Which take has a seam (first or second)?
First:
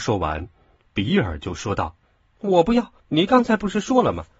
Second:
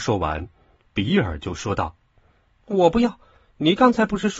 first